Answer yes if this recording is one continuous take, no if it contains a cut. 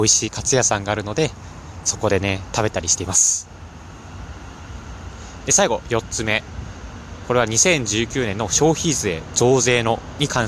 yes